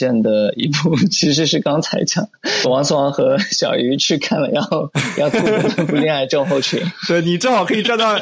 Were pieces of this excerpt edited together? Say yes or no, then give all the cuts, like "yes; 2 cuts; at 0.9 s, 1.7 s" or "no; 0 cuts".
yes; 1 cut; at 2.6 s